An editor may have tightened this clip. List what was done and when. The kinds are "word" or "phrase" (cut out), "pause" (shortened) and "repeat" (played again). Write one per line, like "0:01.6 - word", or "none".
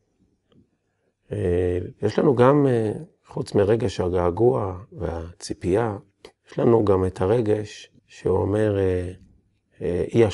0:06.4 - pause
0:08.0 - pause